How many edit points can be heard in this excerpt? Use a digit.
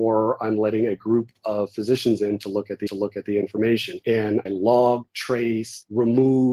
2